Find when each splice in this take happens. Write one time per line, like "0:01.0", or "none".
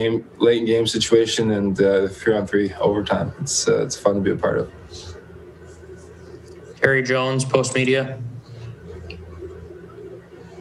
none